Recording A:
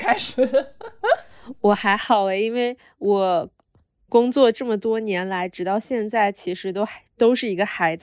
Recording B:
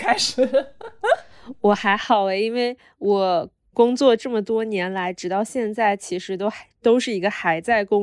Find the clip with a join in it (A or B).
B